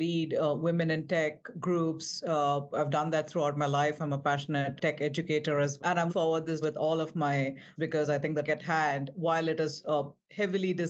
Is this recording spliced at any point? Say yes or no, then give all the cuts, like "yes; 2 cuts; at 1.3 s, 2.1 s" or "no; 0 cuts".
yes; 6 cuts; at 4.8 s, 5.8 s, 6.1 s, 6.6 s, 7.8 s, 8.4 s